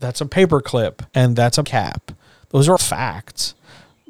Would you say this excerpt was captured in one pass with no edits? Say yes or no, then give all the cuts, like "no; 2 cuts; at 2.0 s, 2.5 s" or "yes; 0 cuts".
no; 3 cuts; at 1.1 s, 1.6 s, 2.8 s